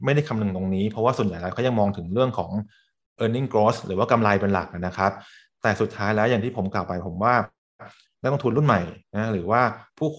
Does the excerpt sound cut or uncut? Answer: uncut